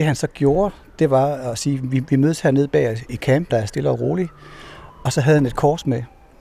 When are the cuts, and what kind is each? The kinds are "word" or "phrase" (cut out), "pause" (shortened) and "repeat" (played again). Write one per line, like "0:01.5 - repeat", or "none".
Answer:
0:03.1 - word
0:03.5 - word